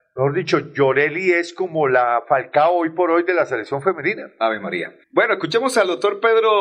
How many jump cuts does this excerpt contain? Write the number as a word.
one